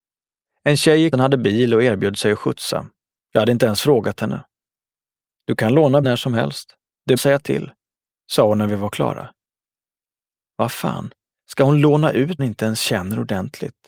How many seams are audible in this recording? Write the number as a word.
five